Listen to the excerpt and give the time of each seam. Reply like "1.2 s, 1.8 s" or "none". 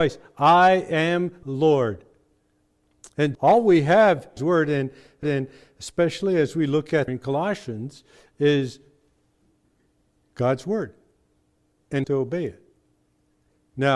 1.4 s, 3.3 s, 4.4 s, 5.2 s, 7.1 s, 12.0 s